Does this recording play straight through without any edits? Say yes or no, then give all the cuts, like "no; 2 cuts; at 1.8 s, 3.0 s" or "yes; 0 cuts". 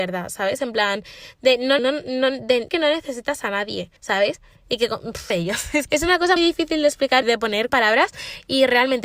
no; 8 cuts; at 1.8 s, 2.7 s, 4.0 s, 5.3 s, 5.9 s, 6.4 s, 7.2 s, 7.7 s